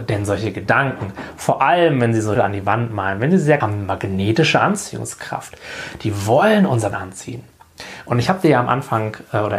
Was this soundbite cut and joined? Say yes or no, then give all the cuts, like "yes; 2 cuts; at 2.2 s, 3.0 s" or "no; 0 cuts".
yes; 3 cuts; at 2.4 s, 3.6 s, 6.9 s